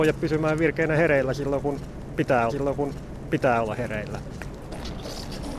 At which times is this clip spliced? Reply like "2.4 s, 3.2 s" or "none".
2.5 s